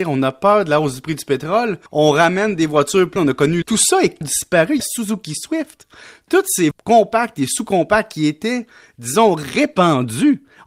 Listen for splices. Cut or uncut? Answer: cut